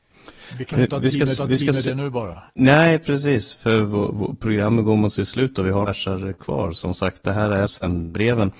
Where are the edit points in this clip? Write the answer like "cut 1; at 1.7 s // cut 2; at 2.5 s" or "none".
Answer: cut 1; at 1.4 s // cut 2; at 2.5 s // cut 3; at 5.8 s // cut 4; at 7.7 s